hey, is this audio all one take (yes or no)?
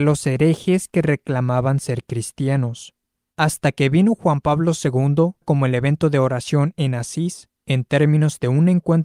no